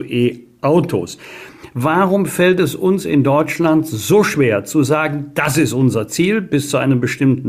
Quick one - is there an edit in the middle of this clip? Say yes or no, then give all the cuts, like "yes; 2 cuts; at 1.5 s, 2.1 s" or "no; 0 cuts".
no; 0 cuts